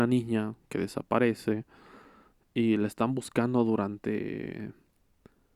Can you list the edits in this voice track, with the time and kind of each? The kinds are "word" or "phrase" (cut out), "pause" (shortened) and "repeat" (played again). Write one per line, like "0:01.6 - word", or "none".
none